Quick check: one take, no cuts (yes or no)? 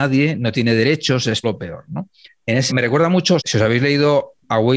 no